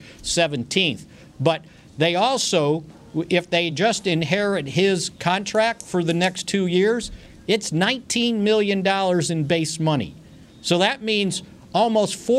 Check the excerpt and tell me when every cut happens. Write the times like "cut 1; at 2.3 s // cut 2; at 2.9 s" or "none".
none